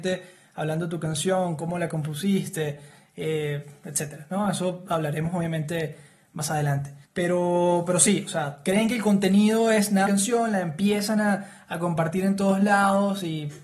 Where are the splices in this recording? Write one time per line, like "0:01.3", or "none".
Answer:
0:10.1